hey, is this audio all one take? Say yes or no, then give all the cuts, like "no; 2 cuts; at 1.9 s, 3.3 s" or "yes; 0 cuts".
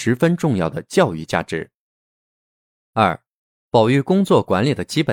yes; 0 cuts